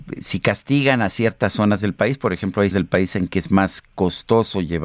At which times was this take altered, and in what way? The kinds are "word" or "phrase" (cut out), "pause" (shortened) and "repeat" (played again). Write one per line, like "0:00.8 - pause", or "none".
0:02.7 - word